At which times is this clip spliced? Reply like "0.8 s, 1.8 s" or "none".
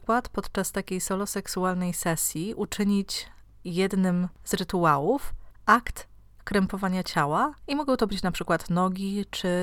none